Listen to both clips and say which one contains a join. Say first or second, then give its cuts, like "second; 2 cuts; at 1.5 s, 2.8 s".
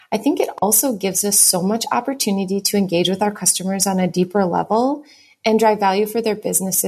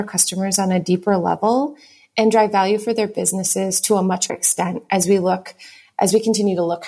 second; 1 cut; at 4.3 s